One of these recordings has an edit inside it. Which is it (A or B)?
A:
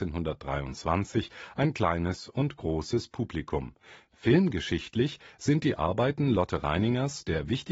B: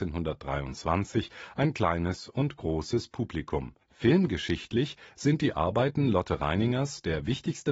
B